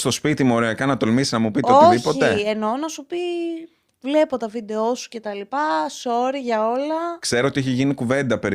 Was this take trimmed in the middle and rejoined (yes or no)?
no